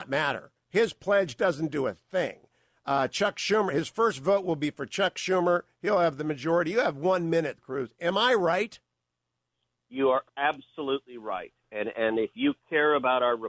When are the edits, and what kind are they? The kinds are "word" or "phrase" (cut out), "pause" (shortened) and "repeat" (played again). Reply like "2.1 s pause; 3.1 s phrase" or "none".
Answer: 7.6 s word